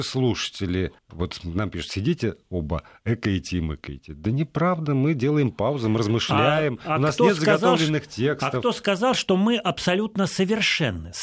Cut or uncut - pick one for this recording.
cut